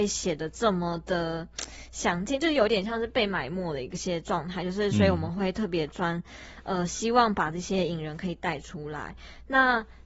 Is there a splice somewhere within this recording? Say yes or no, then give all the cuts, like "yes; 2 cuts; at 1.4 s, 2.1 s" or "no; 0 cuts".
no; 0 cuts